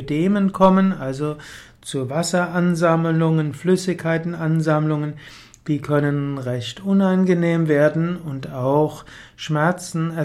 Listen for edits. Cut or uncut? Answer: uncut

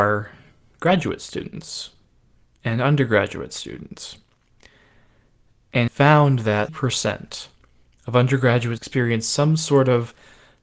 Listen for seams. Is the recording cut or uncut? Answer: cut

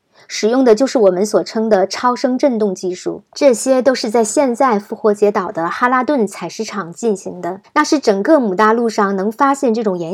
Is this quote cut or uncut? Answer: cut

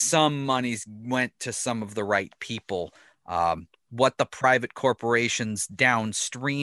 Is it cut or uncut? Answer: uncut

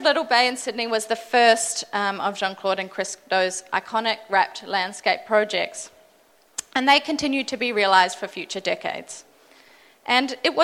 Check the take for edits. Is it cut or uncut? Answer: uncut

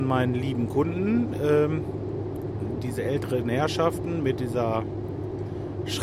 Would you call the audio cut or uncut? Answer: uncut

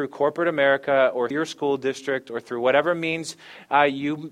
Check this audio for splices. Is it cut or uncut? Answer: cut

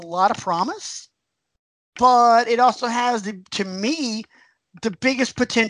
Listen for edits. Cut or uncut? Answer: uncut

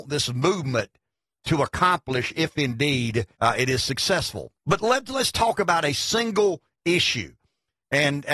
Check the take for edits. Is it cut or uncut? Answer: cut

